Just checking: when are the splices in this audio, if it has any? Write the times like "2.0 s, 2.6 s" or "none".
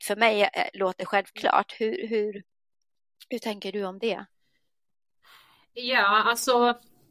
none